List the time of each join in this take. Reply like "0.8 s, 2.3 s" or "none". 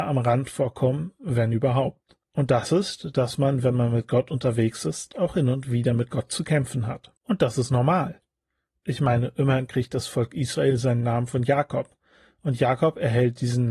2.2 s, 7.2 s